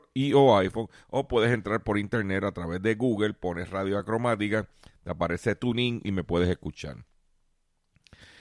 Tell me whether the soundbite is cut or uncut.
uncut